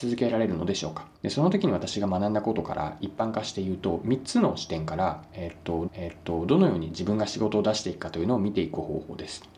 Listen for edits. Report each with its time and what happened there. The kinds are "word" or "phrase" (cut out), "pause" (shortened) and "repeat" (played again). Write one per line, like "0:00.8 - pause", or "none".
0:01.1 - pause
0:05.9 - repeat